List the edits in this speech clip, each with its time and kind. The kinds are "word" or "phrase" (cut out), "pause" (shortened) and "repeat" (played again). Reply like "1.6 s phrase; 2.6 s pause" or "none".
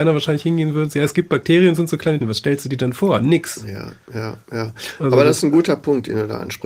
0.9 s word; 2.2 s word